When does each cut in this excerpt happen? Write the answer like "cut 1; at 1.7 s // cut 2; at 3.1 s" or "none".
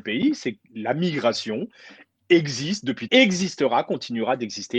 cut 1; at 3.1 s